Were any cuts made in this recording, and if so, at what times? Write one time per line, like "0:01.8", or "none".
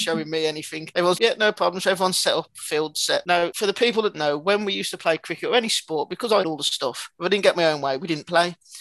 0:01.2
0:04.1
0:06.4
0:07.1